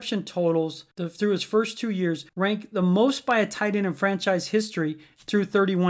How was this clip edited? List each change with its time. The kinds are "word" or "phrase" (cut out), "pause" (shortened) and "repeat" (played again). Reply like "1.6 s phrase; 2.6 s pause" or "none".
0.9 s pause; 2.3 s pause